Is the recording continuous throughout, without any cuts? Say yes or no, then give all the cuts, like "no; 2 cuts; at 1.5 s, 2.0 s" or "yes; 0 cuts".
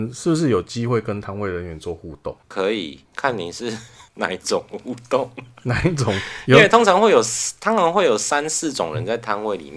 no; 3 cuts; at 2.4 s, 3.1 s, 4.1 s